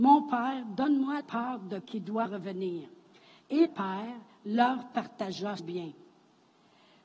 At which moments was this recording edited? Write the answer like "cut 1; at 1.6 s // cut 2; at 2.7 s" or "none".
cut 1; at 1.2 s // cut 2; at 1.8 s // cut 3; at 2.2 s // cut 4; at 3.6 s // cut 5; at 5.6 s